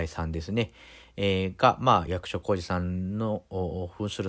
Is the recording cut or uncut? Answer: cut